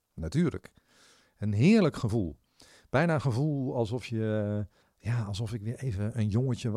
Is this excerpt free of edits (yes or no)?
no